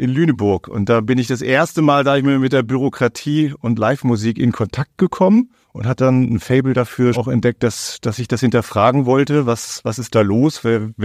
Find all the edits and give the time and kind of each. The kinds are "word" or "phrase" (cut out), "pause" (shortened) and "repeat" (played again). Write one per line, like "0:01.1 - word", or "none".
0:05.6 - pause
0:07.1 - word